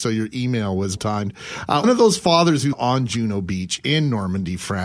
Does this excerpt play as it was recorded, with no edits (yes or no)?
no